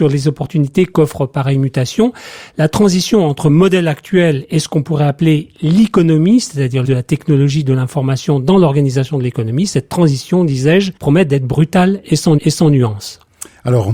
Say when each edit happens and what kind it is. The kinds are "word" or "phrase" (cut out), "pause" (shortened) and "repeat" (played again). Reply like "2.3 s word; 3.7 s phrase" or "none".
6.8 s phrase; 11.0 s pause; 12.4 s repeat